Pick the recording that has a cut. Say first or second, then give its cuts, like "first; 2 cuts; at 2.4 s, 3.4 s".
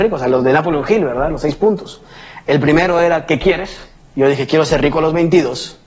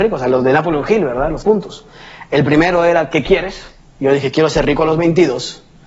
second; 1 cut; at 1.4 s